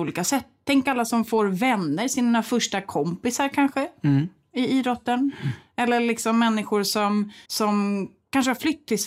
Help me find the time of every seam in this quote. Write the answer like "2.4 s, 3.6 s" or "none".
7.4 s